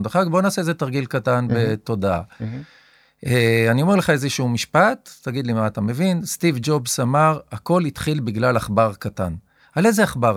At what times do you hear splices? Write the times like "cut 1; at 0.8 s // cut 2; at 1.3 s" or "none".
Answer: none